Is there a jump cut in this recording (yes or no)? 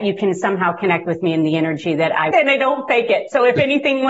yes